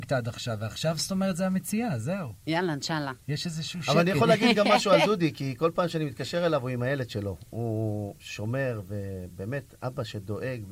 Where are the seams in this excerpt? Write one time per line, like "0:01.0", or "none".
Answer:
0:08.2